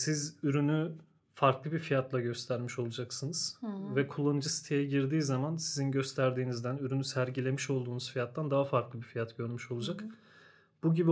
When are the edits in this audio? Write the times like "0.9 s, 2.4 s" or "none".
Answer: none